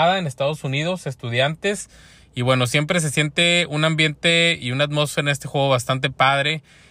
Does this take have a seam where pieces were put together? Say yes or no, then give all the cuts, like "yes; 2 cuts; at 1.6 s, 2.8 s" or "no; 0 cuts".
no; 0 cuts